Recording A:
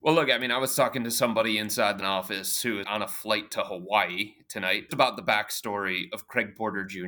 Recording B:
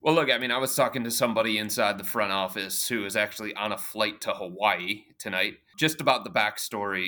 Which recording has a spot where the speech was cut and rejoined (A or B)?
A